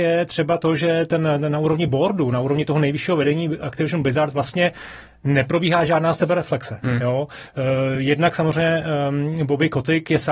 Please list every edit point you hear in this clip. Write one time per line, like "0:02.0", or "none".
none